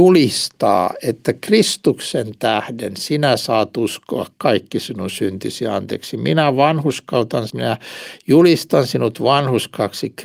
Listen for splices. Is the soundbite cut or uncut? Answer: cut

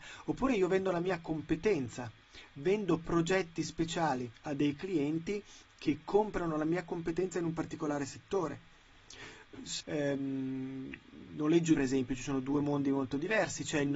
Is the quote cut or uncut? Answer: cut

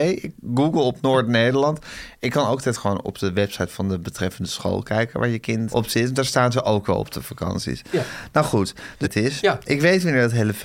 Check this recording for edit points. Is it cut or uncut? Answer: cut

